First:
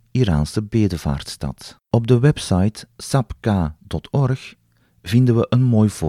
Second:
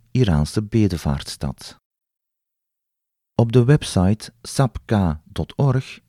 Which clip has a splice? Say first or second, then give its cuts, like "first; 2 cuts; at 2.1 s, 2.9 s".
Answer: first; 1 cut; at 1.8 s